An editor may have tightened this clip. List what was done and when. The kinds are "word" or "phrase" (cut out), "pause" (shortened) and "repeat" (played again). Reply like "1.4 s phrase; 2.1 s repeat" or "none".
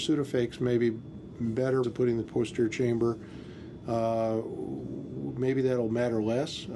1.8 s phrase; 2.2 s phrase